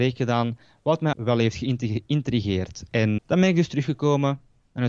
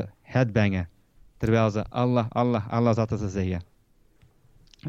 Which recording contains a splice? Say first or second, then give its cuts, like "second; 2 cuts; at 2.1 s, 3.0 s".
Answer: first; 2 cuts; at 1.1 s, 3.2 s